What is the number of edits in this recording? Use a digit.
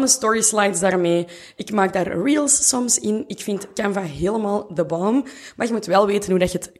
0